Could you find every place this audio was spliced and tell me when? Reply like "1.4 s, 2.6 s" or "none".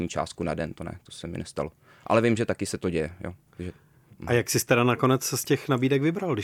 none